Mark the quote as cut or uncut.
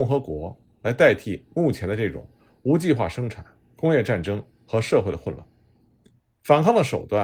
uncut